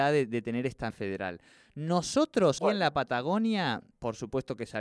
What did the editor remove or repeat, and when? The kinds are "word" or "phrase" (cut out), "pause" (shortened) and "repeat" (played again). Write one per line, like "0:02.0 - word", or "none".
0:00.9 - word
0:02.6 - word
0:03.9 - word